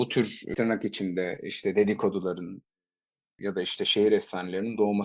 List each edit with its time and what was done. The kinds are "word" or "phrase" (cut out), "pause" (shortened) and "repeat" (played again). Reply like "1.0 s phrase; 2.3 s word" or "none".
none